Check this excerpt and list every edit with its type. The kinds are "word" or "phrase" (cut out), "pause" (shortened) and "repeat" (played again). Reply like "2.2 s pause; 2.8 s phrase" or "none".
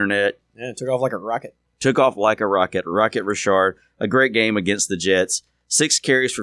none